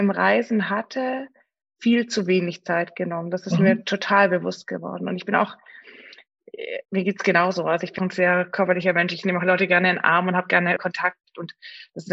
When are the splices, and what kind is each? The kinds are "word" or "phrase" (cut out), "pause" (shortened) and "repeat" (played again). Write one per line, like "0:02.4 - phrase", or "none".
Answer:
0:06.8 - pause
0:08.0 - word
0:10.8 - word